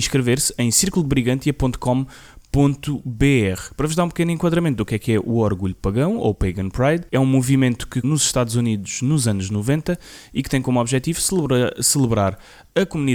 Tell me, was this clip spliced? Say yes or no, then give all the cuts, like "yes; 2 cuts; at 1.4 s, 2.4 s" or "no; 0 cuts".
yes; 2 cuts; at 7.1 s, 8.0 s